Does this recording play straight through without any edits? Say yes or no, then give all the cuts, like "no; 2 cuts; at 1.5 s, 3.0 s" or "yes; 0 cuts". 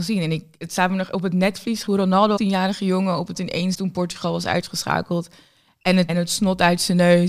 no; 5 cuts; at 1.9 s, 2.4 s, 3.3 s, 3.7 s, 6.1 s